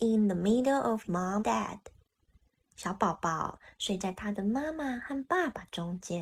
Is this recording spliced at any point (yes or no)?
yes